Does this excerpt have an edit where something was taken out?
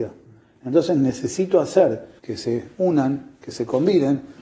yes; 1 cut; at 2.2 s

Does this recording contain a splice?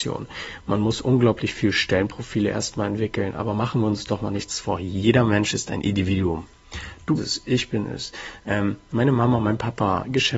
yes; 1 cut; at 7.2 s

